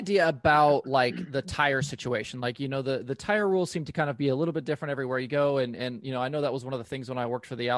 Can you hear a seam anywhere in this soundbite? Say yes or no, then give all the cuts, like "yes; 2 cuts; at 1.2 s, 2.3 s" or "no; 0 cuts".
no; 0 cuts